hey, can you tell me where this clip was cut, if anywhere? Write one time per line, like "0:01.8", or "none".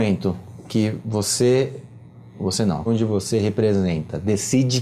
0:02.9